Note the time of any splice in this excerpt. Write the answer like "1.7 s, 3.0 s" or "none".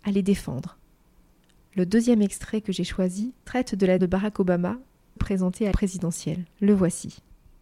3.4 s, 4.0 s, 5.2 s, 5.7 s, 6.5 s